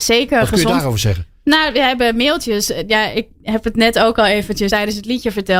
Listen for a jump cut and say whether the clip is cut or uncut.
cut